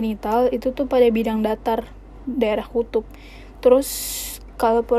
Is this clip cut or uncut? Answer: uncut